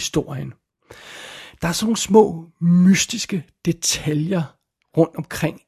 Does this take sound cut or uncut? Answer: uncut